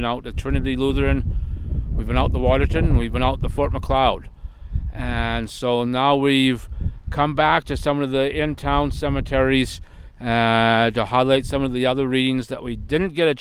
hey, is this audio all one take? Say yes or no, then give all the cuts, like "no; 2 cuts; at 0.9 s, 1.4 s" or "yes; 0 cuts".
yes; 0 cuts